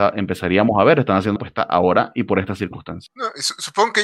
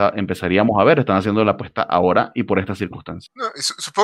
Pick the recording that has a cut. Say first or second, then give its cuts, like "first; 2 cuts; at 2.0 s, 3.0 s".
first; 1 cut; at 1.4 s